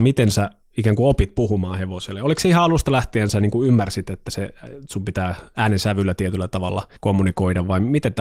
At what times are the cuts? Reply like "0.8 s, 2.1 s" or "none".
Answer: 7.0 s